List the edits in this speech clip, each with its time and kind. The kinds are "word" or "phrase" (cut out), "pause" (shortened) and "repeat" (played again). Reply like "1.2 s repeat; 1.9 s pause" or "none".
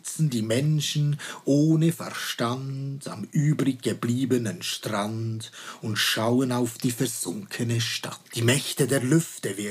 8.3 s pause